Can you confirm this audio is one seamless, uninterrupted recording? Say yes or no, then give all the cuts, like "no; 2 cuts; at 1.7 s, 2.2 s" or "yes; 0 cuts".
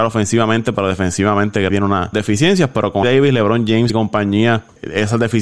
no; 4 cuts; at 1.7 s, 2.1 s, 3.0 s, 3.9 s